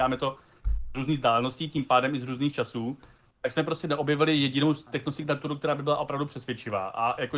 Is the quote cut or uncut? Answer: uncut